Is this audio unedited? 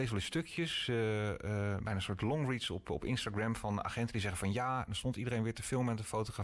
yes; 0 cuts

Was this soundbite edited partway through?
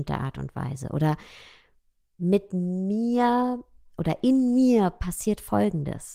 no; 0 cuts

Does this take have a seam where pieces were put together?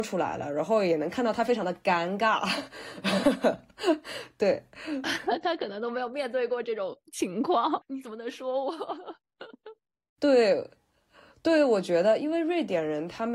no; 0 cuts

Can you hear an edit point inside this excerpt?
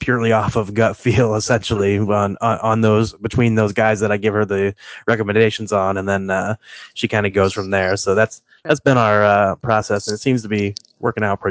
no; 0 cuts

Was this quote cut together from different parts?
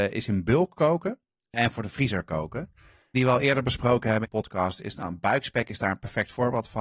yes; 2 cuts; at 3.1 s, 4.2 s

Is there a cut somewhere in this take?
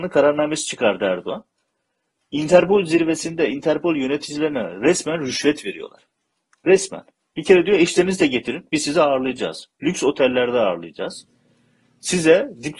no; 0 cuts

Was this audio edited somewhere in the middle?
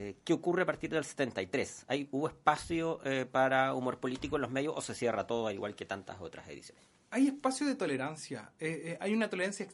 no; 0 cuts

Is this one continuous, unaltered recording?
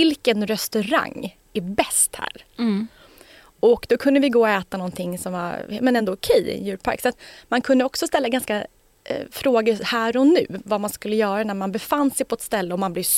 yes; 0 cuts

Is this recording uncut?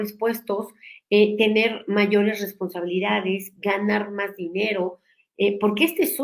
yes; 0 cuts

